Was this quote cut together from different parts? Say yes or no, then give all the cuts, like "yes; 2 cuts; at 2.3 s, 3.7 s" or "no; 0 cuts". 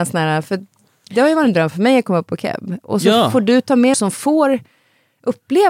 yes; 1 cut; at 3.9 s